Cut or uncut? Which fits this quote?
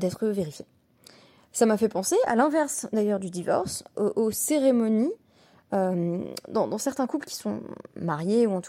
uncut